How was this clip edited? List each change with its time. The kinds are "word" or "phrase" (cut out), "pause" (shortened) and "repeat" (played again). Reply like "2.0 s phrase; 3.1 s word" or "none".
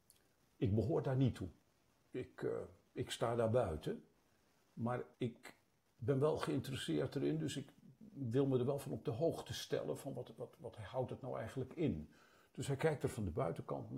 5.1 s pause